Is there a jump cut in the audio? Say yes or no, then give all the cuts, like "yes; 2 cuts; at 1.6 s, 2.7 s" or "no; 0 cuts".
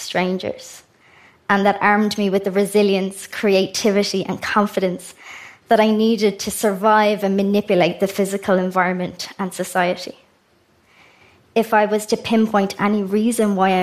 no; 0 cuts